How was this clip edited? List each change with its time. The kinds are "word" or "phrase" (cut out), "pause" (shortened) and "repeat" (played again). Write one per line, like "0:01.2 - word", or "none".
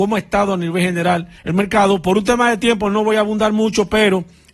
0:01.4 - pause